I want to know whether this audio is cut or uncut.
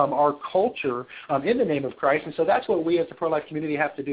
uncut